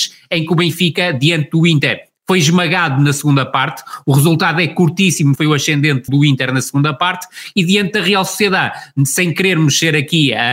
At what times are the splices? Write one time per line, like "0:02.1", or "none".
0:05.4
0:06.1